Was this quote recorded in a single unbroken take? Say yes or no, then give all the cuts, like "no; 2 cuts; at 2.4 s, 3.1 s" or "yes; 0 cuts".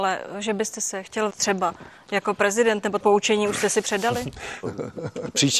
no; 3 cuts; at 1.3 s, 3.0 s, 4.6 s